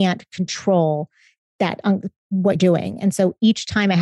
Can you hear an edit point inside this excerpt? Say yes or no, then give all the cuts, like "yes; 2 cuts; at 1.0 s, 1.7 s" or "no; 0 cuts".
yes; 2 cuts; at 1.4 s, 2.6 s